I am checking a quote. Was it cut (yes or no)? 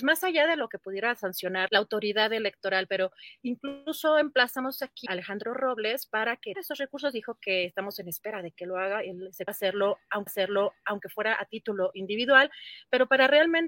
yes